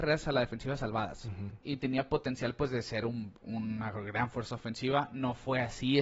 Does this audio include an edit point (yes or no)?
yes